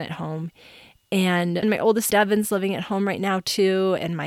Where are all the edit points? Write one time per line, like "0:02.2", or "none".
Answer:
0:01.6
0:02.1